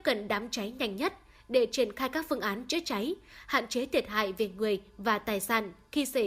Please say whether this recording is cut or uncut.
uncut